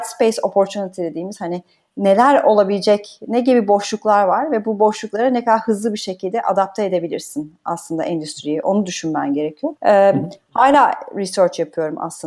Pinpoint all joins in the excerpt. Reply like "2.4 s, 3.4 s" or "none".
9.8 s